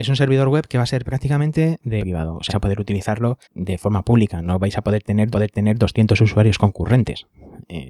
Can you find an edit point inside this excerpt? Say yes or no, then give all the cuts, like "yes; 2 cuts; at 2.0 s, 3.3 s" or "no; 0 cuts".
yes; 4 cuts; at 2.0 s, 2.5 s, 3.4 s, 5.3 s